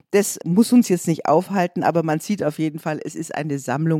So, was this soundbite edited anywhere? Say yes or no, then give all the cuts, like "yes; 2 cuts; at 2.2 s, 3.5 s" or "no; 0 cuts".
no; 0 cuts